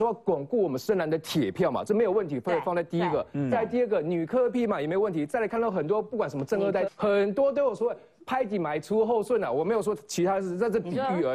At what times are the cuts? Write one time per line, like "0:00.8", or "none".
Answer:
0:06.9